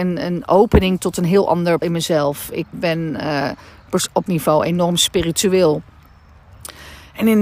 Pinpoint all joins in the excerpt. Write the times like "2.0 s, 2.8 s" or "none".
1.8 s, 2.7 s, 4.3 s